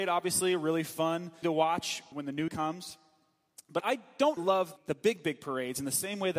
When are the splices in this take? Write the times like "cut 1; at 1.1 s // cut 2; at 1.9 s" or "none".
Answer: cut 1; at 1.4 s // cut 2; at 2.1 s // cut 3; at 2.5 s // cut 4; at 3.8 s // cut 5; at 4.4 s // cut 6; at 4.8 s

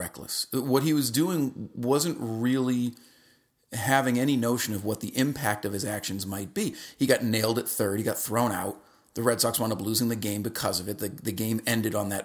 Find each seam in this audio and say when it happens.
none

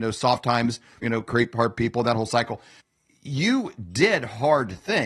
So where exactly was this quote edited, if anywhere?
cut 1; at 1.0 s // cut 2; at 2.8 s

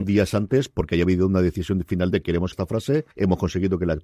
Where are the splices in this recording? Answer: cut 1; at 2.1 s // cut 2; at 2.5 s // cut 3; at 3.1 s

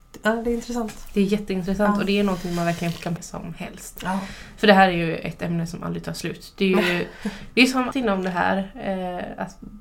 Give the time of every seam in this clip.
cut 1; at 3.2 s // cut 2; at 7.9 s

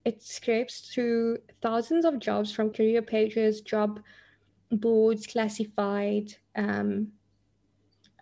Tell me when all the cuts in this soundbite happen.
cut 1; at 2.7 s

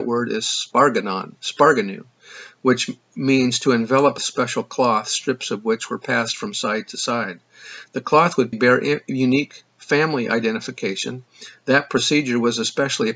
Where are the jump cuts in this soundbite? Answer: cut 1; at 4.2 s // cut 2; at 8.5 s

